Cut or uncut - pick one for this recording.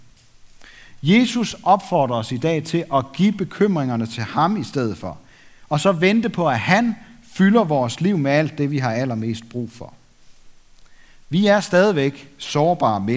uncut